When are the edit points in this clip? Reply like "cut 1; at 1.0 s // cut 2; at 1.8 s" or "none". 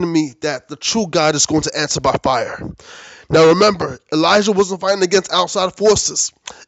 none